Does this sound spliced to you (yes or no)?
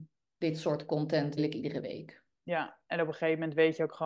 yes